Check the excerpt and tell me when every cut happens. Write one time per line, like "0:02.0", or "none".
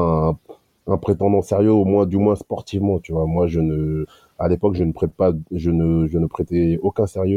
none